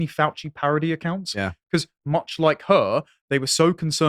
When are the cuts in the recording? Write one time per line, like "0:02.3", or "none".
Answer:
none